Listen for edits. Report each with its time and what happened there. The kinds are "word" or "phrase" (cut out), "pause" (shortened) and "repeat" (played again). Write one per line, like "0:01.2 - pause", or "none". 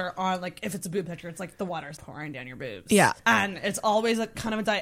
0:02.0 - word
0:03.2 - pause